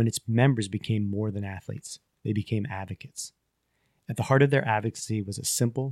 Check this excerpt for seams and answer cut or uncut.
uncut